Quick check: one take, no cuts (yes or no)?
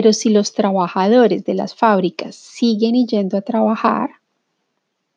yes